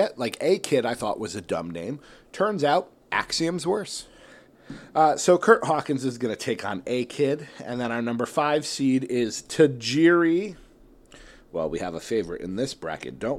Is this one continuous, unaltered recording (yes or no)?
no